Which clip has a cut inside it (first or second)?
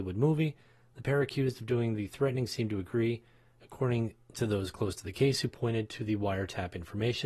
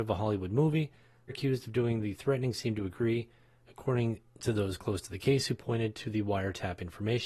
second